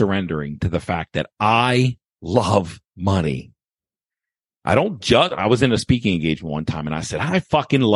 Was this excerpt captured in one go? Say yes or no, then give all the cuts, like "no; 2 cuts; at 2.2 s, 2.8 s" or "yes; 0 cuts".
no; 1 cut; at 2.8 s